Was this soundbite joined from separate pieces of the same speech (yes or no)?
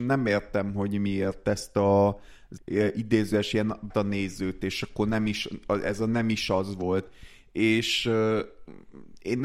yes